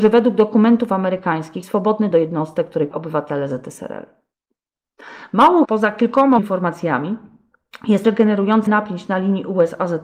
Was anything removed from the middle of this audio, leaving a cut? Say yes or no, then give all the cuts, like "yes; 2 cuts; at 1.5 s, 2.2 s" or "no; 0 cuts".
yes; 7 cuts; at 1.6 s, 2.1 s, 2.9 s, 5.6 s, 6.4 s, 8.0 s, 8.7 s